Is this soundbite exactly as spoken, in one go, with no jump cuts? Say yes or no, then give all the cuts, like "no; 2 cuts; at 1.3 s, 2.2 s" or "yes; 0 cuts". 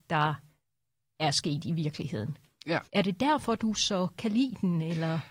no; 2 cuts; at 2.8 s, 4.2 s